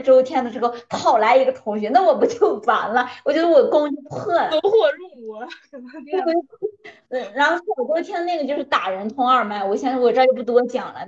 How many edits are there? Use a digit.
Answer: 1